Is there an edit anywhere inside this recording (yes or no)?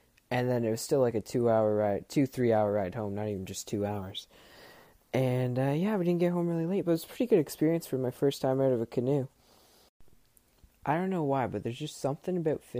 no